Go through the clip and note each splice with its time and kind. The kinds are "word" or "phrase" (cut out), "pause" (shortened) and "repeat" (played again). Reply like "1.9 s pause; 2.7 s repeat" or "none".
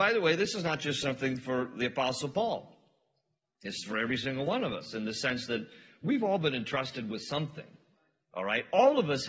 none

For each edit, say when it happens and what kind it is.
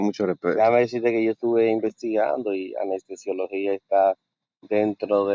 none

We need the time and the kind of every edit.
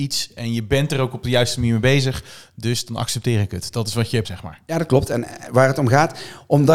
4.2 s word

